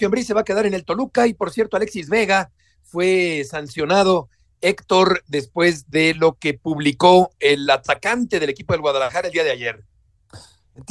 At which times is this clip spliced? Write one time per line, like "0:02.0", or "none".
none